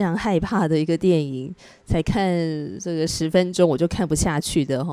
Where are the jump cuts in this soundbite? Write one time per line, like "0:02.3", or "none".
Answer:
none